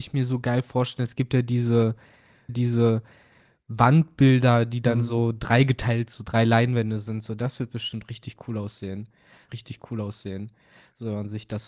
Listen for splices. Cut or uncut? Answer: cut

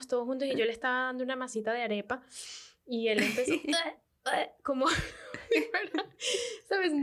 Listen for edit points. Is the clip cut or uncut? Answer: uncut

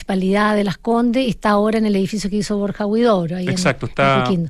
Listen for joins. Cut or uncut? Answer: uncut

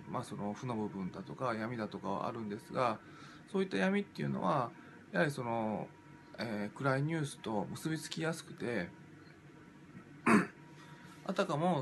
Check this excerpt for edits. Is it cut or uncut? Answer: uncut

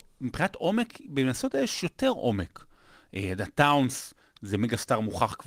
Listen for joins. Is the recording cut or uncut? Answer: uncut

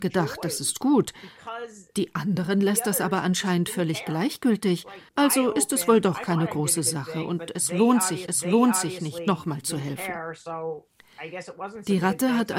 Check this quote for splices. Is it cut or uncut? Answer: cut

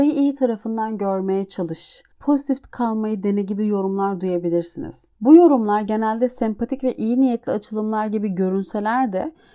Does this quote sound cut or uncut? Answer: cut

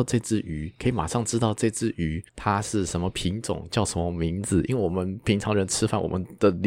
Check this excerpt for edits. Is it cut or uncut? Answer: cut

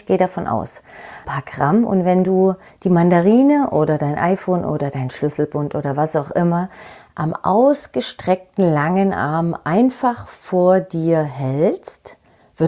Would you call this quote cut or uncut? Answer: uncut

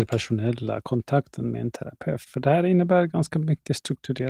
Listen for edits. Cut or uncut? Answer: uncut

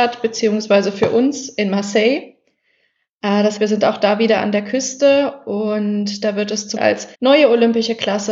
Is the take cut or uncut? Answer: cut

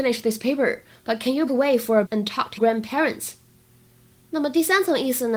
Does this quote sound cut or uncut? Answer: cut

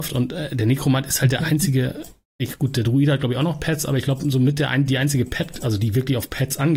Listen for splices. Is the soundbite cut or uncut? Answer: uncut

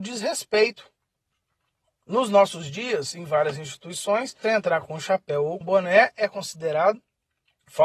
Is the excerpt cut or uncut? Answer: cut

